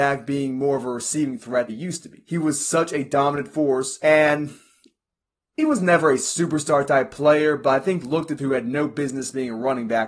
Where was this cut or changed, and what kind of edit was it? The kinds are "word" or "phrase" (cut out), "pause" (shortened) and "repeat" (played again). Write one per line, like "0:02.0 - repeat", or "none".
0:01.7 - phrase
0:08.0 - word
0:08.4 - word